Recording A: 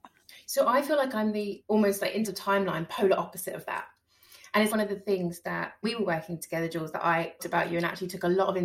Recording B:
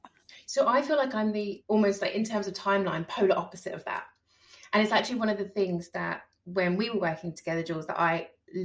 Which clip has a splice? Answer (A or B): A